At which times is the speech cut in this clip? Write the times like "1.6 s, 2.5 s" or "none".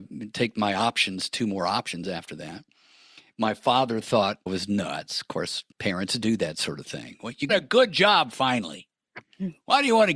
4.5 s, 5.7 s, 7.5 s